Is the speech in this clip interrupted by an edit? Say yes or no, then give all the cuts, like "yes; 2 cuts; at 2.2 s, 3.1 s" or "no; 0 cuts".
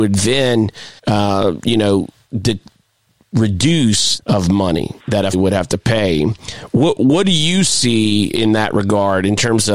yes; 4 cuts; at 1.0 s, 4.2 s, 5.0 s, 5.3 s